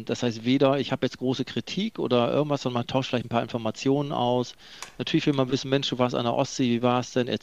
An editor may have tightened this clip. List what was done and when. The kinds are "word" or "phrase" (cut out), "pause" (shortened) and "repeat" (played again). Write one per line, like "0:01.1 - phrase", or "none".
none